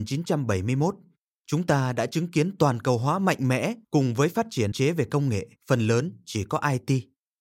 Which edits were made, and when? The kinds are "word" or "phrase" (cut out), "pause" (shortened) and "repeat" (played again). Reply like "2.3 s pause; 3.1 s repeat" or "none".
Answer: 3.8 s pause; 4.7 s word; 5.6 s pause